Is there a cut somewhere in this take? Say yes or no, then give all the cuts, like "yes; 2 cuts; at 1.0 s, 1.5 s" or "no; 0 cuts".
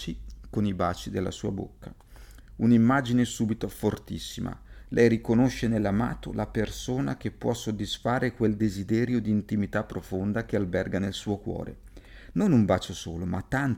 no; 0 cuts